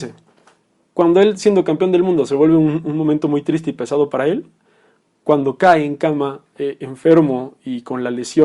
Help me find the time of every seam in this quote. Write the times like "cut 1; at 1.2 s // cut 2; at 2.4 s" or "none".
none